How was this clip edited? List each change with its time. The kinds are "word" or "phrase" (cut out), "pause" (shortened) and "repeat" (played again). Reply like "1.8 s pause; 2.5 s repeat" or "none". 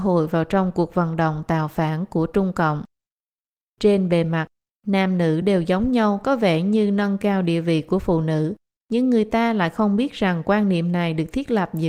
none